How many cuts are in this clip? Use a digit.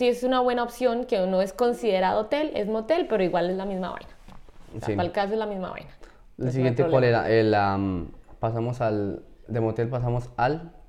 0